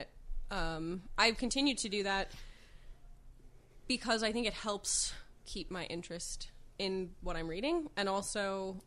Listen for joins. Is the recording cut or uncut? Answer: uncut